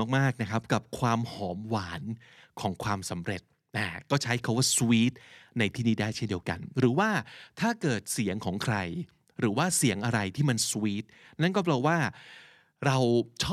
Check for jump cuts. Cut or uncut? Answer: uncut